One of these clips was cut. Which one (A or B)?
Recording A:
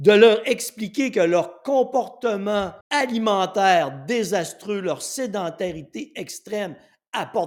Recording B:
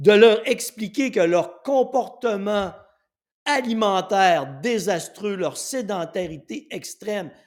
A